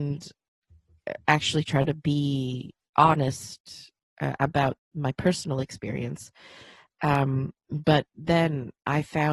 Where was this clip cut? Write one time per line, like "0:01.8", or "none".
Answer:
none

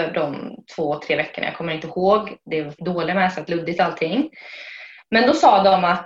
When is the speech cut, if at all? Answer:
0:02.8
0:03.5

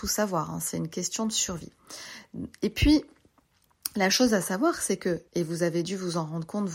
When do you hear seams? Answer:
0:05.3

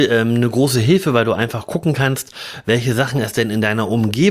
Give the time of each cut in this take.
none

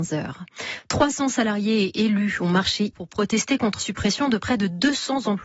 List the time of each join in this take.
0:02.9
0:03.8

